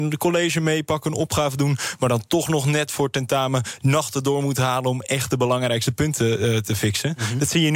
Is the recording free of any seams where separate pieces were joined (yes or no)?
yes